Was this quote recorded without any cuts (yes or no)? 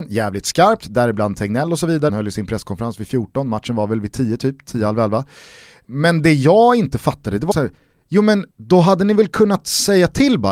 no